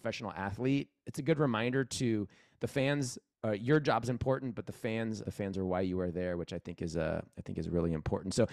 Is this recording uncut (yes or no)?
no